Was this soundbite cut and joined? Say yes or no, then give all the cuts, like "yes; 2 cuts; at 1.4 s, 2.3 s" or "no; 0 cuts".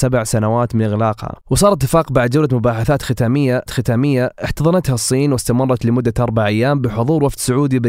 yes; 2 cuts; at 1.4 s, 3.7 s